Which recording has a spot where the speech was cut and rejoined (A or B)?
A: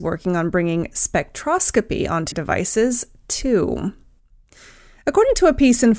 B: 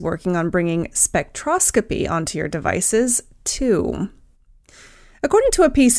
A